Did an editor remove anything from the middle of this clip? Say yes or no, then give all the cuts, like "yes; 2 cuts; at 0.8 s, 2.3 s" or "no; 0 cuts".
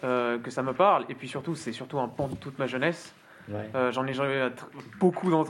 no; 0 cuts